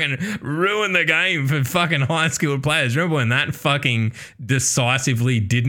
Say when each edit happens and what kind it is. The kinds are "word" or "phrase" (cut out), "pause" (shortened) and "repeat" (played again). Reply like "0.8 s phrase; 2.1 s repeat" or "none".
none